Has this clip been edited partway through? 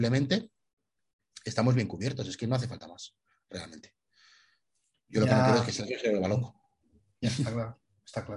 no; 0 cuts

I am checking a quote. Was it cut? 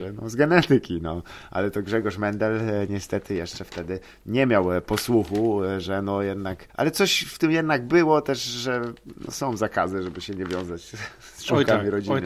yes; 1 cut; at 6.7 s

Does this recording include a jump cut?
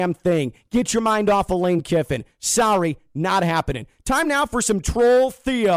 no; 0 cuts

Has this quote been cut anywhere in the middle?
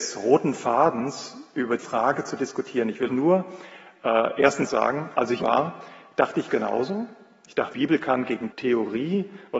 yes; 7 cuts; at 1.8 s, 3.1 s, 4.7 s, 5.4 s, 6.5 s, 7.7 s, 8.5 s

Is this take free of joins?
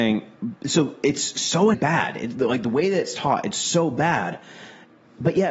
no; 1 cut; at 1.7 s

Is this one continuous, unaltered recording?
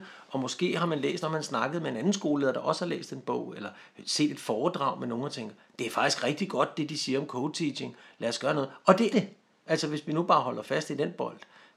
no; 2 cuts; at 1.2 s, 9.1 s

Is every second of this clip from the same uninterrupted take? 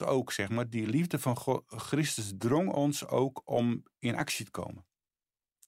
yes; 0 cuts

